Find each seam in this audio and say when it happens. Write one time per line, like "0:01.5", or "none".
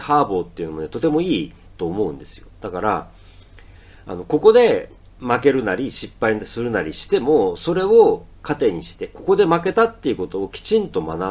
none